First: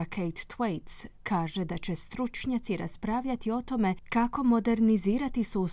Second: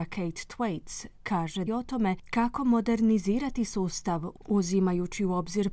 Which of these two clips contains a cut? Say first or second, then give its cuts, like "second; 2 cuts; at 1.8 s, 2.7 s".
second; 1 cut; at 1.7 s